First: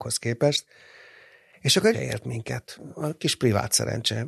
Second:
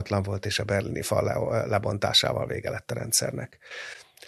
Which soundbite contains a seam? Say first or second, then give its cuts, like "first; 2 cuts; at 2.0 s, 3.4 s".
first; 1 cut; at 1.9 s